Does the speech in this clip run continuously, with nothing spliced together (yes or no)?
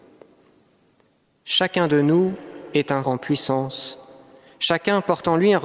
no